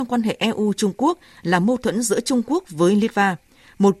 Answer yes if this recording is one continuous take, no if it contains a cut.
yes